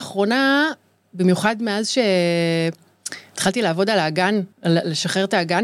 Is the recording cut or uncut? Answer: cut